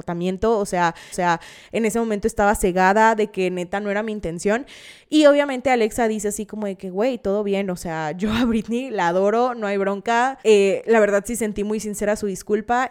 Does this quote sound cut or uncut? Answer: cut